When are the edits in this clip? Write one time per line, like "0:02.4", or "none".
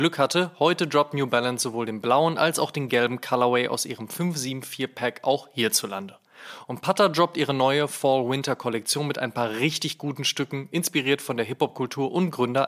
none